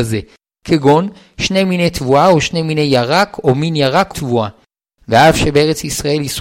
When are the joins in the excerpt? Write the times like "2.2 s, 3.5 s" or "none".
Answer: 4.1 s